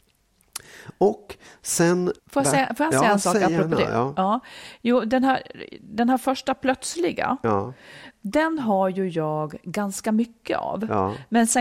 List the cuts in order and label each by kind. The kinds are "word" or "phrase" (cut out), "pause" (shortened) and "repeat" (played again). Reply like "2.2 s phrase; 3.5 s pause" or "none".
2.2 s pause